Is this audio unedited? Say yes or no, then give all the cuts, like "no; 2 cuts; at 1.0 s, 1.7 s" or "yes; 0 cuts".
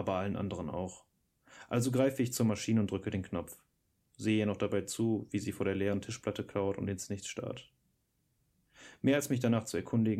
yes; 0 cuts